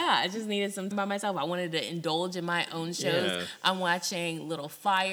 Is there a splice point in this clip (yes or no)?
yes